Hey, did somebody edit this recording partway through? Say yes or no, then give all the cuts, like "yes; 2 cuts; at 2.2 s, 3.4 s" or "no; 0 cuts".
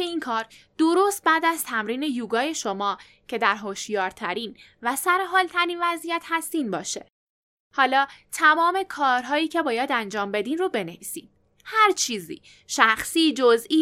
no; 0 cuts